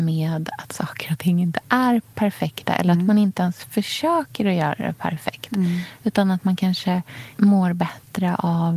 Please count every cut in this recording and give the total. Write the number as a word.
one